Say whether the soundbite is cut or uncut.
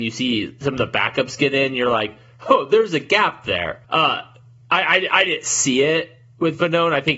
cut